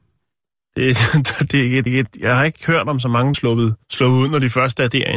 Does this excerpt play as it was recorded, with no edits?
no; 3 cuts; at 1.9 s, 3.3 s, 3.8 s

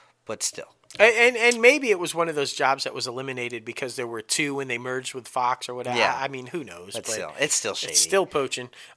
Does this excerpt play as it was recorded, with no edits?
yes; 0 cuts

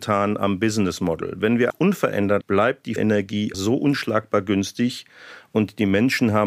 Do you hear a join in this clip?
yes; 4 cuts; at 1.7 s, 2.4 s, 3.0 s, 3.5 s

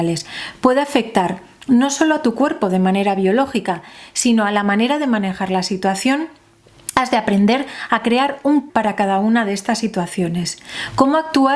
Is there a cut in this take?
yes; 1 cut; at 8.7 s

